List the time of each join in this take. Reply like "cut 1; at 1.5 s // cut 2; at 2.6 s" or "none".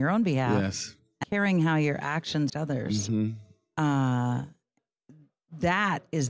cut 1; at 1.2 s // cut 2; at 2.5 s